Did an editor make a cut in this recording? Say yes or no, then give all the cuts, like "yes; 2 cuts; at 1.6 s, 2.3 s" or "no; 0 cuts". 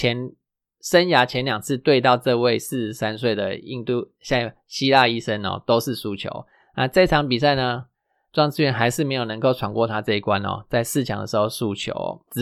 no; 0 cuts